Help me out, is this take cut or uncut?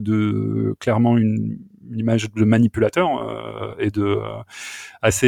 uncut